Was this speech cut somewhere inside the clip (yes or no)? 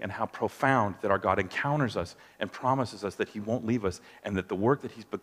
no